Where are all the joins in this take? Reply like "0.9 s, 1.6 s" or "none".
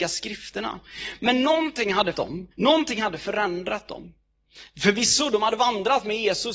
2.1 s, 2.5 s

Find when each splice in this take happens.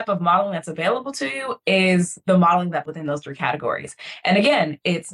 2.9 s

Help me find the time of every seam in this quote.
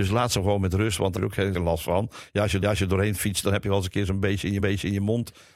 1.2 s, 1.5 s, 2.6 s, 4.6 s

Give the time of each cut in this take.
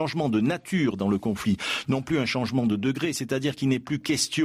none

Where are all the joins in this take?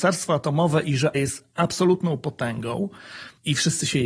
1.1 s

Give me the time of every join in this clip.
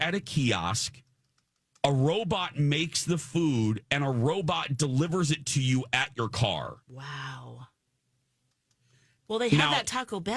6.8 s

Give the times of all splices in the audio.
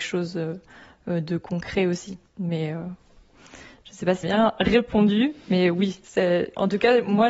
4.2 s

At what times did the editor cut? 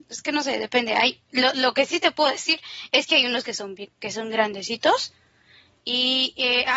none

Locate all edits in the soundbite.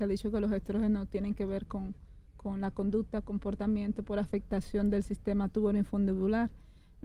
2.3 s

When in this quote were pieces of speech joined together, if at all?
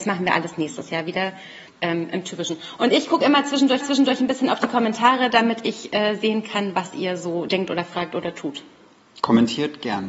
1.7 s, 3.8 s

